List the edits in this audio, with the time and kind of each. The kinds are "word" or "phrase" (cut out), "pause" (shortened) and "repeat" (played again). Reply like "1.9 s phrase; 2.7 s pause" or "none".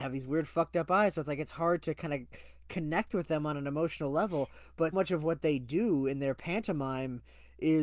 4.9 s word